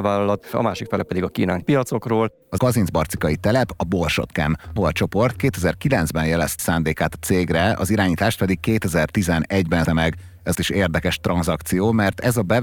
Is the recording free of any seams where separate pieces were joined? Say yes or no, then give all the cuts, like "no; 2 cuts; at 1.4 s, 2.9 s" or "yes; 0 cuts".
no; 6 cuts; at 1.6 s, 2.6 s, 4.8 s, 6.6 s, 9.8 s, 10.5 s